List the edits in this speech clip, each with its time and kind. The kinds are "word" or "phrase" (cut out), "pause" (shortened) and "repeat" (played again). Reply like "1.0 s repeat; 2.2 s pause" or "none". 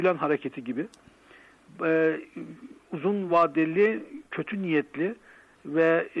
none